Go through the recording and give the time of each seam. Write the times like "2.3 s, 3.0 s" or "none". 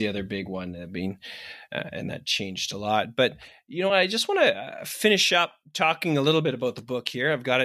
none